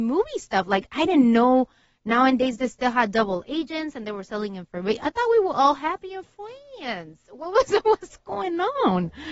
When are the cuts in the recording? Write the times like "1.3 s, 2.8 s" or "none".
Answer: none